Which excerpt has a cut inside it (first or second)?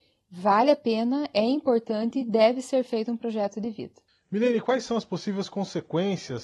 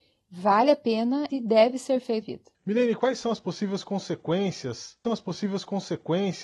second